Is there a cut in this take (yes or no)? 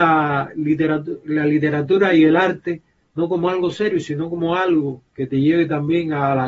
no